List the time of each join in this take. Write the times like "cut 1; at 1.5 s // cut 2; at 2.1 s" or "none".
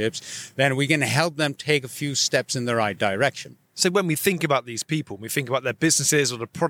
cut 1; at 3.6 s

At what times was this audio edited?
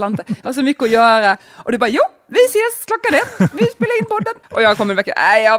cut 1; at 4.4 s

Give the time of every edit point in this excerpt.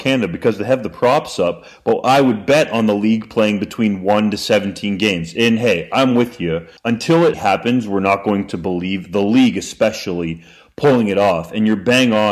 cut 1; at 6.8 s // cut 2; at 7.3 s

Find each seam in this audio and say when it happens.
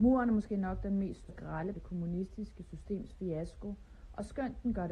cut 1; at 1.3 s // cut 2; at 1.7 s

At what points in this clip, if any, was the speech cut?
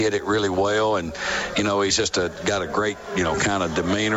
none

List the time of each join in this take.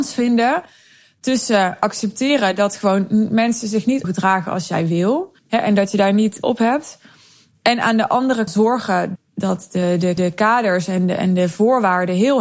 cut 1; at 4.0 s // cut 2; at 5.4 s // cut 3; at 6.4 s // cut 4; at 8.5 s // cut 5; at 9.2 s // cut 6; at 10.2 s

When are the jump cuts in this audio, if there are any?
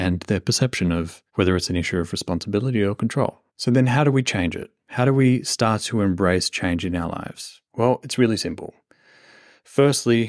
cut 1; at 1.3 s // cut 2; at 3.5 s // cut 3; at 7.6 s

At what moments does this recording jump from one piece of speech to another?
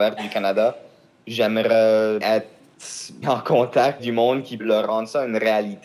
cut 1; at 2.2 s // cut 2; at 3.2 s // cut 3; at 4.0 s // cut 4; at 4.6 s

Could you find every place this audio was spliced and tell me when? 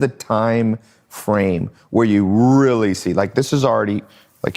none

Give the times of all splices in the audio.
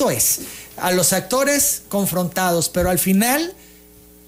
none

